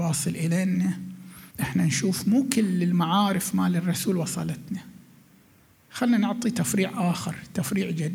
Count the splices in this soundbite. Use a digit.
1